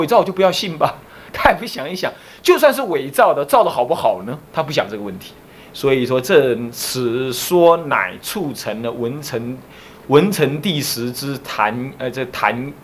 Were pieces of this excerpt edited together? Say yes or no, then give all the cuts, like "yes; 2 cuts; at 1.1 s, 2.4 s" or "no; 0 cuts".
yes; 1 cut; at 4.5 s